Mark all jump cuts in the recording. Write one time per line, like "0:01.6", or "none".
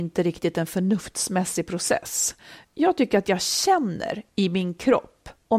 0:02.7